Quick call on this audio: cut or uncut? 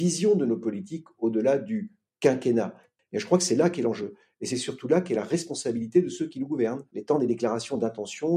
uncut